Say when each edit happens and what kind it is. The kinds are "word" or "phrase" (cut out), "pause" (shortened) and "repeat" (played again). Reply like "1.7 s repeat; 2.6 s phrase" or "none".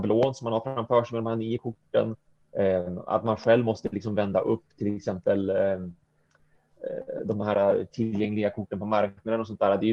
none